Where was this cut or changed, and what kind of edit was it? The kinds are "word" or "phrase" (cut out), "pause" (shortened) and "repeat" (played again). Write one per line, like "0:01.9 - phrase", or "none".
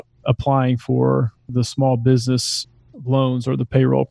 none